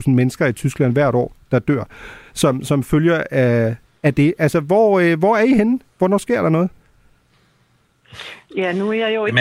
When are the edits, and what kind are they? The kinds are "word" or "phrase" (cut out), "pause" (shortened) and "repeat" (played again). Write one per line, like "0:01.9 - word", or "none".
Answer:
none